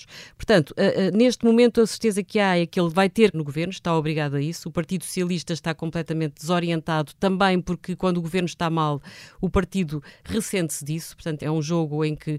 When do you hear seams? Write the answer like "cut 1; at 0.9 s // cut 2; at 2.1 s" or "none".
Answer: cut 1; at 3.3 s // cut 2; at 11.4 s

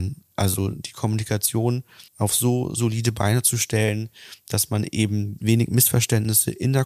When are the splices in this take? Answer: cut 1; at 2.1 s // cut 2; at 5.4 s

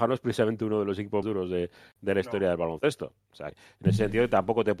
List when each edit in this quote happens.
cut 1; at 1.2 s // cut 2; at 3.5 s

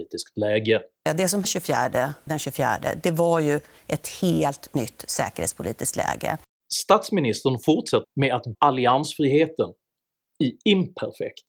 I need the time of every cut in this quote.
cut 1; at 1.4 s // cut 2; at 2.3 s // cut 3; at 8.0 s // cut 4; at 8.5 s

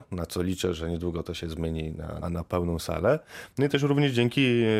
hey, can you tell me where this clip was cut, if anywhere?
cut 1; at 2.2 s

